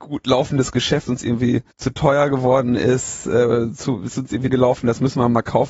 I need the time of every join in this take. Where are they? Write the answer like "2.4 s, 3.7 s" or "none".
1.1 s, 1.7 s, 4.5 s